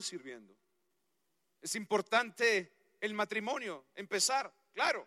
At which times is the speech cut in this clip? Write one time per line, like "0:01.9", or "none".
none